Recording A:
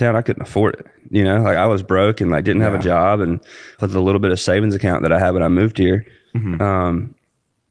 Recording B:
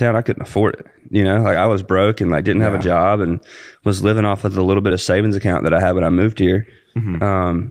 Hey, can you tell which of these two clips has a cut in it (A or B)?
A